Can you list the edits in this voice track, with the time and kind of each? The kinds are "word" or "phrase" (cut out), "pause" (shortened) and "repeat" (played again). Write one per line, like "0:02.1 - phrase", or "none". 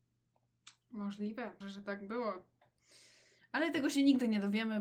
0:01.6 - word